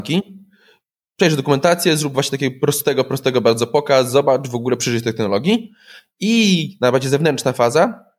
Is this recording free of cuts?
yes; 0 cuts

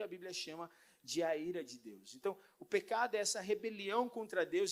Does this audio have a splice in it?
no; 0 cuts

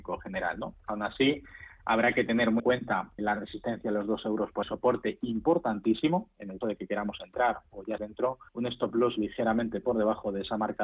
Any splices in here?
yes; 6 cuts; at 2.6 s, 3.2 s, 4.6 s, 6.6 s, 8.0 s, 8.5 s

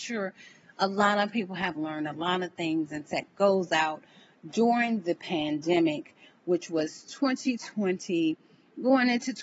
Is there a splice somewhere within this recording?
no; 0 cuts

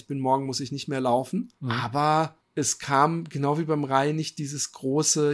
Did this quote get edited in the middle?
yes; 2 cuts; at 1.6 s, 2.4 s

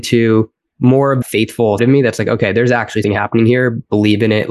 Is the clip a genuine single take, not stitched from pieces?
no; 3 cuts; at 1.2 s, 1.8 s, 3.0 s

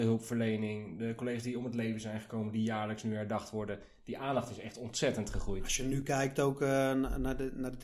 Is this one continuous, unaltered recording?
yes; 0 cuts

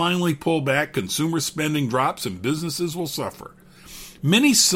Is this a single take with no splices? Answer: yes; 0 cuts

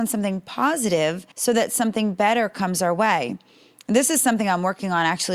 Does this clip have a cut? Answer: yes; 1 cut; at 1.3 s

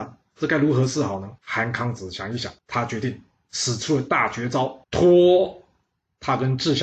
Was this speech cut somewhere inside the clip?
yes; 3 cuts; at 1.4 s, 2.6 s, 4.8 s

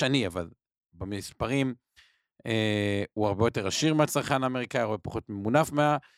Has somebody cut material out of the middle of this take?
no; 0 cuts

